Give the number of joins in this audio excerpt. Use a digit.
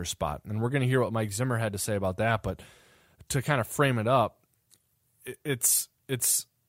0